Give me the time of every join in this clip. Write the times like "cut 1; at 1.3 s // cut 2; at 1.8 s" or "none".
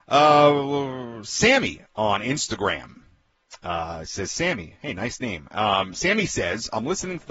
none